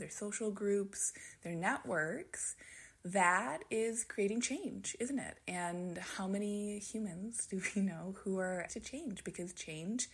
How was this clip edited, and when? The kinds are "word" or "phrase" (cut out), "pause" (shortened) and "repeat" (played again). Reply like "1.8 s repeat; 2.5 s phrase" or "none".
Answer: 8.7 s word